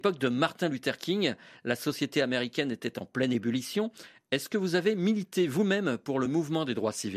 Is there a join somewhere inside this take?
no; 0 cuts

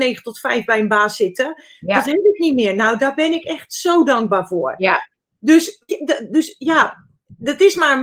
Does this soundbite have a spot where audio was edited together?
yes; 1 cut; at 5.9 s

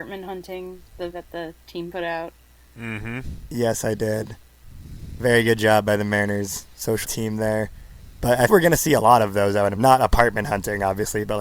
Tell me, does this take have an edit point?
yes; 4 cuts; at 1.1 s, 7.0 s, 8.5 s, 9.8 s

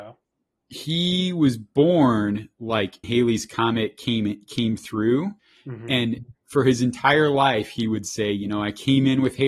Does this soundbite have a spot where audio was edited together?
yes; 2 cuts; at 3.0 s, 5.4 s

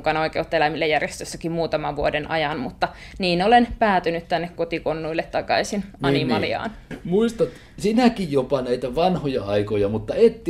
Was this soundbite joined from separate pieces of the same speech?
no; 0 cuts

